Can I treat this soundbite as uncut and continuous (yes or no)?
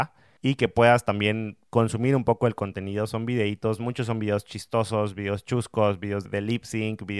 no